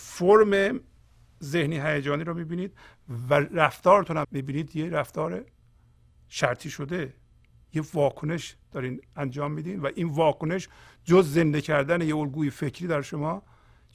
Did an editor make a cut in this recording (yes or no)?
yes